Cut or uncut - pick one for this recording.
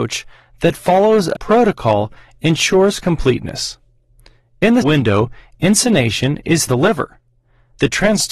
cut